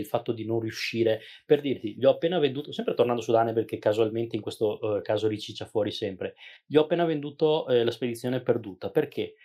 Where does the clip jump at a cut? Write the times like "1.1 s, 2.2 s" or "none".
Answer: none